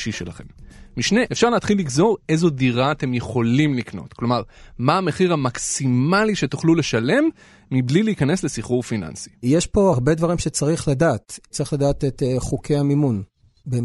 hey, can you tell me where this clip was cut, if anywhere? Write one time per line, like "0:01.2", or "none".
0:01.3
0:09.9